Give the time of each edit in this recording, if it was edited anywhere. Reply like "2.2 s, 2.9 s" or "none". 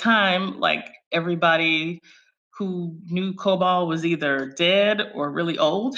none